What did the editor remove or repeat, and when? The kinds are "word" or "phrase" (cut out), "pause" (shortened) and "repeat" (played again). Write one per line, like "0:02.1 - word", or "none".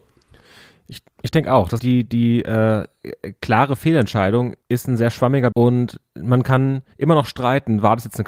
0:01.1 - pause
0:01.8 - phrase
0:04.6 - pause
0:05.5 - word
0:06.9 - pause